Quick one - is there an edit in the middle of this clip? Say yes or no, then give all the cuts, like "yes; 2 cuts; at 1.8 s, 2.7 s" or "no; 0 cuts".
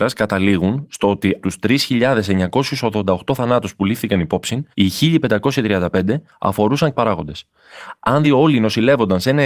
yes; 4 cuts; at 1.4 s, 4.7 s, 6.9 s, 8.2 s